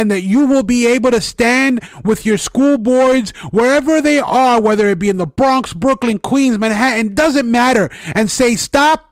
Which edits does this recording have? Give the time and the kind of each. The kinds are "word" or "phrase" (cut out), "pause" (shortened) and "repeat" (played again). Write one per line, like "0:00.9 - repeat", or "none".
none